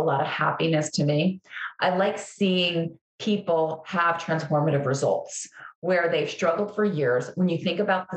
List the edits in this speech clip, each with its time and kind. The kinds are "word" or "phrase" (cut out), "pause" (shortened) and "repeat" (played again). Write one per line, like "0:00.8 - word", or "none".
none